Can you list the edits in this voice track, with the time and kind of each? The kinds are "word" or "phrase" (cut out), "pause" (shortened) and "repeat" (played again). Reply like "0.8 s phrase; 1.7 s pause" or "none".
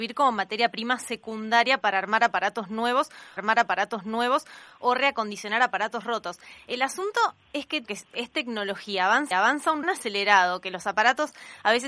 3.4 s repeat; 7.8 s phrase; 9.3 s repeat; 9.8 s phrase